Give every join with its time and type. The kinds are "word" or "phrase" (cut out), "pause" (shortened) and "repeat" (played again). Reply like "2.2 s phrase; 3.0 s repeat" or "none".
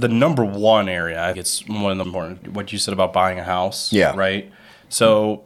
1.3 s word; 2.0 s word; 2.4 s word